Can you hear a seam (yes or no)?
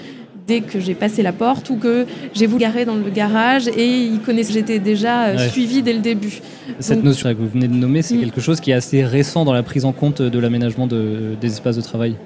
yes